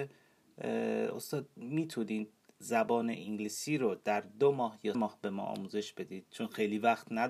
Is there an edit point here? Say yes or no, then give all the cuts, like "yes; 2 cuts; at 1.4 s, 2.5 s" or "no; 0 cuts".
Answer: yes; 1 cut; at 4.9 s